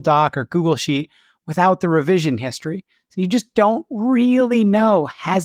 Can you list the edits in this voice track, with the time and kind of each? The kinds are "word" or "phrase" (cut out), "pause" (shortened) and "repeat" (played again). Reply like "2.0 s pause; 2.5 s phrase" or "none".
none